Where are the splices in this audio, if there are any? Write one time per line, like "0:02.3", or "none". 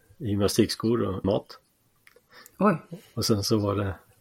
0:01.2